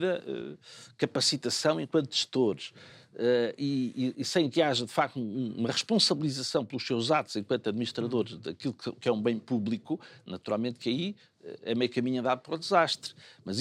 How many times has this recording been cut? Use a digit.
0